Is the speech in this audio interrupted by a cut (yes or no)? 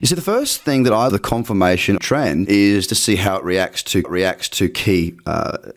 yes